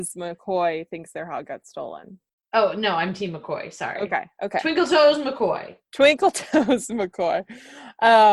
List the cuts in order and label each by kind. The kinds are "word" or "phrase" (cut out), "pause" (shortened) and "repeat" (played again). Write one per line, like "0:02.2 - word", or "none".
0:02.3 - pause